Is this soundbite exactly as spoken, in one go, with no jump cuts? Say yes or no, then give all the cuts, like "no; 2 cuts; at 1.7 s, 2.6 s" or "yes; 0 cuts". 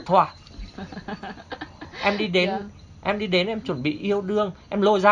yes; 0 cuts